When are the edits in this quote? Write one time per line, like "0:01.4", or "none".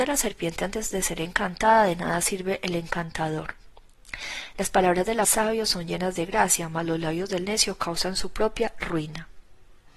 0:05.2